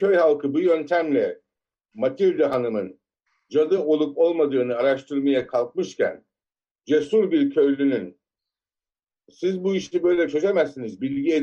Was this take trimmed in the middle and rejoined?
no; 0 cuts

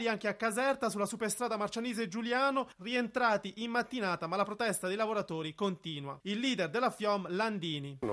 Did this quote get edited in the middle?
no; 0 cuts

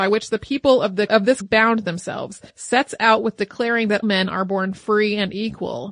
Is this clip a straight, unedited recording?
no; 4 cuts; at 1.1 s, 1.4 s, 2.5 s, 4.0 s

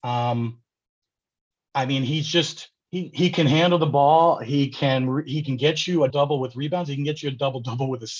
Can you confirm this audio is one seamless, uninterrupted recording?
no; 2 cuts; at 2.8 s, 6.1 s

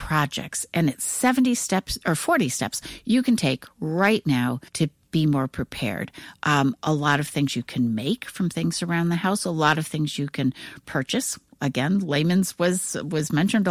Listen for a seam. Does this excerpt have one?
yes; 1 cut; at 4.7 s

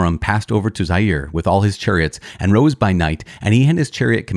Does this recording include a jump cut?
no; 0 cuts

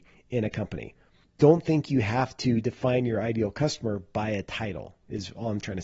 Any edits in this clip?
no; 0 cuts

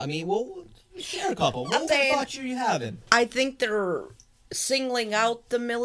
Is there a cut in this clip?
yes; 1 cut; at 1.9 s

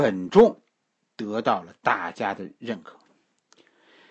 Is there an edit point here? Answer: no; 0 cuts

